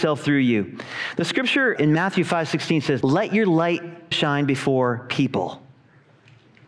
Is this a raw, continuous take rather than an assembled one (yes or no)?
no